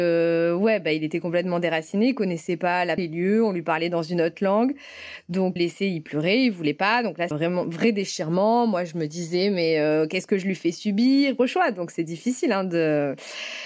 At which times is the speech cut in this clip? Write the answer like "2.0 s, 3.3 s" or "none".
3.0 s, 5.6 s, 7.3 s, 11.4 s